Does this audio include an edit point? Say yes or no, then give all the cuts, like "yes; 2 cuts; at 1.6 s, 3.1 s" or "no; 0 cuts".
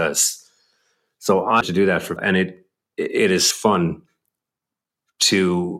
yes; 3 cuts; at 1.6 s, 2.2 s, 3.5 s